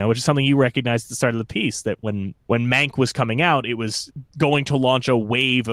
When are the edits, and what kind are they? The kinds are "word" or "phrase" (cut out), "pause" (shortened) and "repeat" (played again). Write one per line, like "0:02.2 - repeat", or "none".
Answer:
0:02.4 - pause